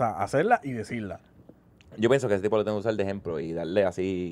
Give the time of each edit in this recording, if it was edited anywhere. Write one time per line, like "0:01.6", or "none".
none